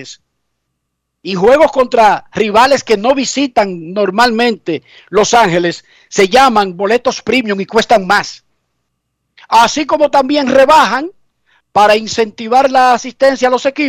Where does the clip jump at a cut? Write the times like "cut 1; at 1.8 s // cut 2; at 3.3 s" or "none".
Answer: none